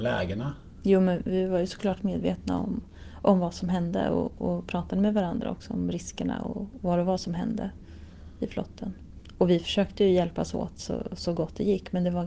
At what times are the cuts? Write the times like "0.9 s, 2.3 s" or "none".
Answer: none